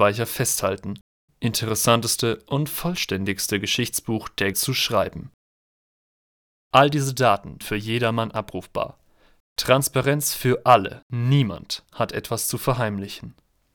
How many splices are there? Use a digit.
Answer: 4